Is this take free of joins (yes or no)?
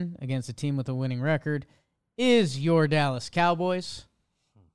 yes